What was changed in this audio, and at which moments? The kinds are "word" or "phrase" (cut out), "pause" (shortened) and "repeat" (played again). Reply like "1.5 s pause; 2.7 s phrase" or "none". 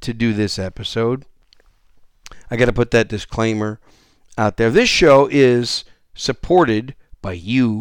none